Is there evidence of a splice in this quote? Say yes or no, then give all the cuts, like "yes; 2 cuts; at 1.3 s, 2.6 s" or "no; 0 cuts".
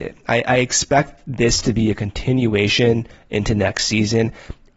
no; 0 cuts